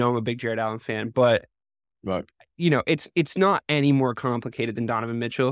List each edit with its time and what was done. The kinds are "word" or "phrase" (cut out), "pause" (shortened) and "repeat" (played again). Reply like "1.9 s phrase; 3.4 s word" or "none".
none